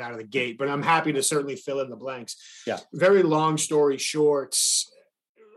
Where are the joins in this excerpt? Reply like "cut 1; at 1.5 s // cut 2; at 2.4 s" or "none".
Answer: none

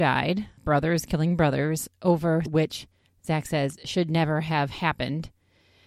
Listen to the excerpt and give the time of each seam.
cut 1; at 2.5 s

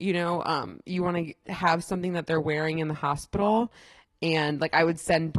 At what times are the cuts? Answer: none

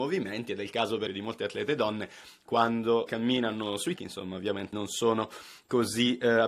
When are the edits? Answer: cut 1; at 1.1 s // cut 2; at 3.1 s // cut 3; at 4.0 s // cut 4; at 4.7 s

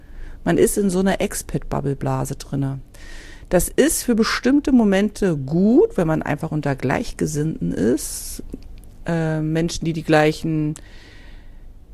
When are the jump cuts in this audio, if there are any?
none

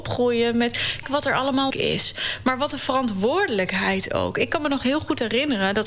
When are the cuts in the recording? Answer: cut 1; at 1.0 s // cut 2; at 1.7 s

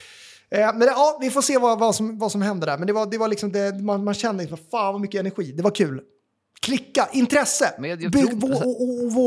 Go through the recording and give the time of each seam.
none

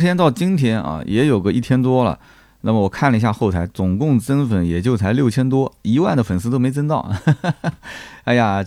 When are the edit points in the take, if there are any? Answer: none

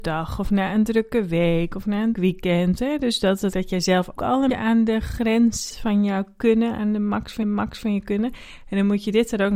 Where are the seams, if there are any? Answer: cut 1; at 2.1 s // cut 2; at 3.5 s // cut 3; at 4.2 s // cut 4; at 4.5 s // cut 5; at 5.7 s // cut 6; at 7.4 s

